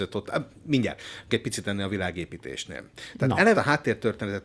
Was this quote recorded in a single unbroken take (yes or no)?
no